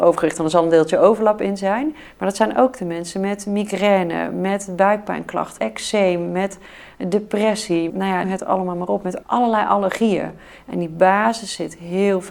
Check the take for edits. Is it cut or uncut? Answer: cut